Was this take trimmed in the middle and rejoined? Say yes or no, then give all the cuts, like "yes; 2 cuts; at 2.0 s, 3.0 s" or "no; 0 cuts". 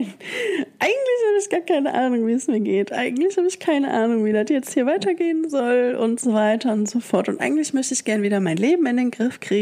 no; 0 cuts